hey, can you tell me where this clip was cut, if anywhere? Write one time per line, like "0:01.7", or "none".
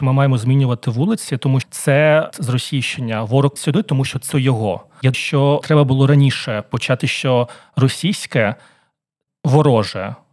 0:01.6
0:02.3
0:03.6
0:04.3
0:05.1
0:05.6
0:07.0
0:09.3